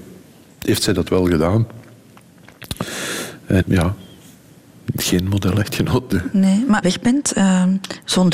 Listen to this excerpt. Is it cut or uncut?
cut